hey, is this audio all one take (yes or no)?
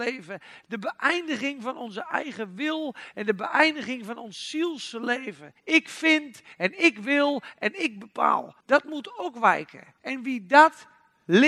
no